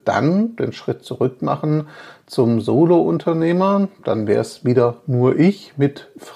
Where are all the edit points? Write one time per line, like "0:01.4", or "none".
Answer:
none

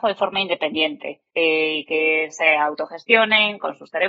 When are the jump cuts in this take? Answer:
0:01.3

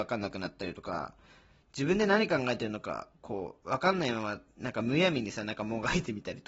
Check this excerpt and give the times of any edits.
0:03.1

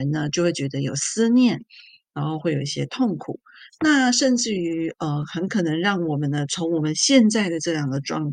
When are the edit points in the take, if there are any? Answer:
none

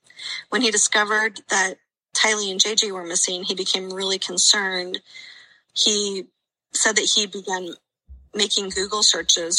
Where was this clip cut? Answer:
none

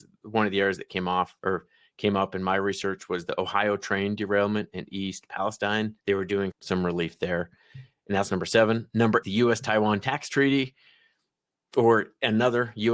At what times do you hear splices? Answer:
0:01.4
0:06.0
0:06.5
0:09.2

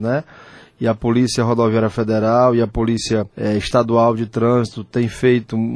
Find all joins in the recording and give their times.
0:03.3

